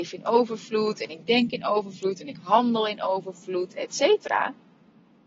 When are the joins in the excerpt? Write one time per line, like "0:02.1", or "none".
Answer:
none